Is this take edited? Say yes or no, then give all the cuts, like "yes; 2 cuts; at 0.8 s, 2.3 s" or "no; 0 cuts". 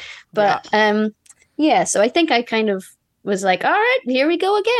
no; 0 cuts